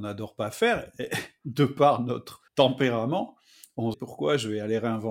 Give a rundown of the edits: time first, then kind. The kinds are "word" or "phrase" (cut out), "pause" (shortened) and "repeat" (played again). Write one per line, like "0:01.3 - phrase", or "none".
0:02.5 - pause
0:03.9 - phrase

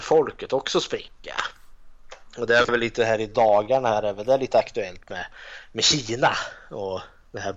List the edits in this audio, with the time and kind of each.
none

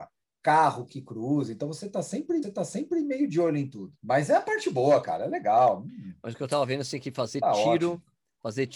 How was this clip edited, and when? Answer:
0:02.4 - repeat
0:04.0 - pause

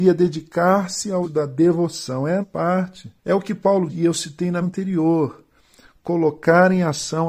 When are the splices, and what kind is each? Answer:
0:01.2 - word
0:02.4 - word
0:03.2 - pause
0:03.9 - word
0:04.6 - word

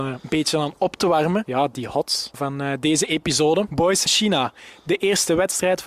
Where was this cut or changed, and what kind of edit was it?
0:02.3 - word
0:04.1 - phrase

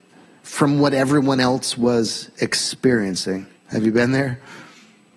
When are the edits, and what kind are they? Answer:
0:03.6 - pause

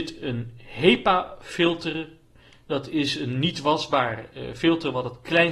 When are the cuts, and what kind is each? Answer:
none

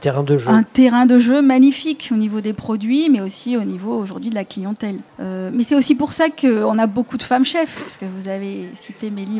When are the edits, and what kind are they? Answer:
0:05.1 - pause

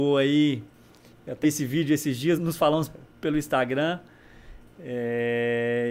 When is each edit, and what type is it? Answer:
0:01.4 - word
0:02.4 - word

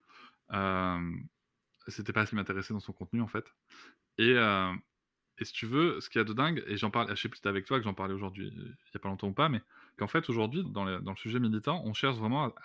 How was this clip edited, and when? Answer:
0:02.3 - word
0:07.3 - word
0:10.0 - word
0:10.6 - word

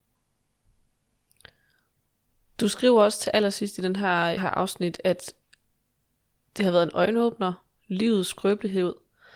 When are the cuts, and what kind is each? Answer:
0:04.4 - phrase

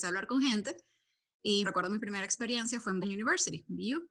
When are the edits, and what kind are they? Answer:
0:01.6 - word
0:03.0 - word

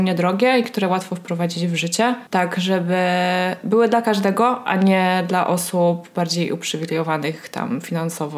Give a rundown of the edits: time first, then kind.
0:02.3 - pause

